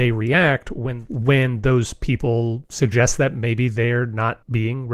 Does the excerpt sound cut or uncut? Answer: uncut